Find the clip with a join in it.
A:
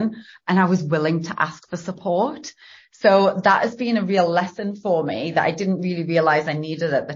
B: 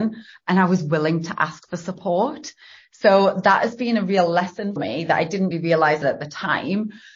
B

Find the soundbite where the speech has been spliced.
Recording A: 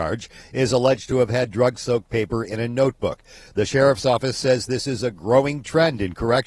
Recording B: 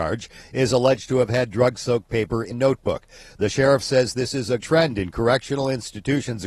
B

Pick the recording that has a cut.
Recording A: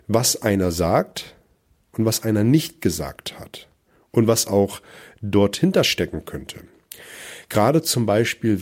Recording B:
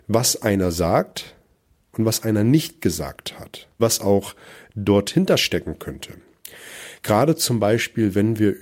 B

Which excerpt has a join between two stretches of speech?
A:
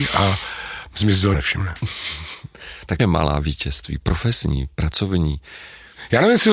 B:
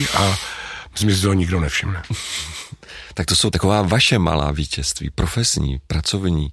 A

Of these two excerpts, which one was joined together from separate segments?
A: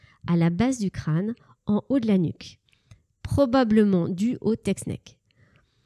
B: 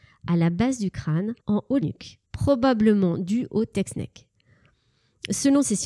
B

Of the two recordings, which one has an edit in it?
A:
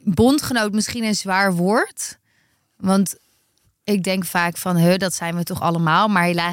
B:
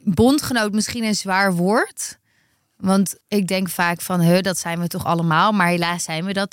B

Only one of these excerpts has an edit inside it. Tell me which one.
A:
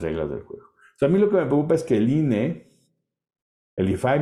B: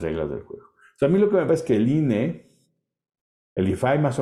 B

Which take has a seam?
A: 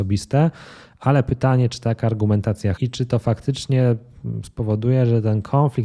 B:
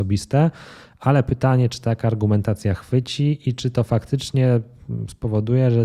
A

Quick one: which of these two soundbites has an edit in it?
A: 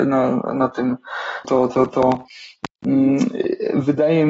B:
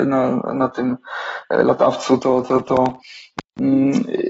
A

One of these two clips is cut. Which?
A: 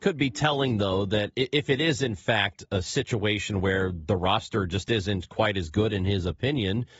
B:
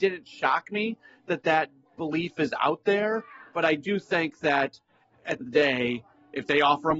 B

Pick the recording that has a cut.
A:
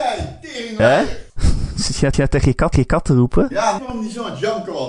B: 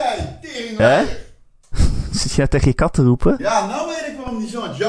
A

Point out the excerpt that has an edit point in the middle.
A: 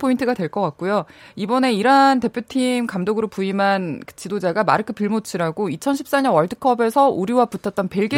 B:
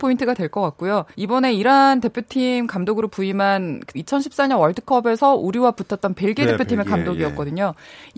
B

